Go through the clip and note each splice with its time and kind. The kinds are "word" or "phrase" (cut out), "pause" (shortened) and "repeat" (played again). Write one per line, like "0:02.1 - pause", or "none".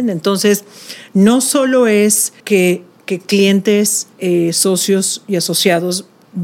0:02.4 - pause
0:04.1 - pause